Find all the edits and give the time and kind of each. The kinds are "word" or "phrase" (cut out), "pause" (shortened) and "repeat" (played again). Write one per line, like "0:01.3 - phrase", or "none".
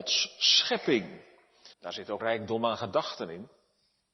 0:01.7 - pause
0:02.2 - word